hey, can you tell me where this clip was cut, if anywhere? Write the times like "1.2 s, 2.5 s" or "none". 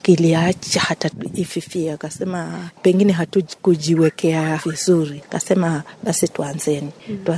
4.6 s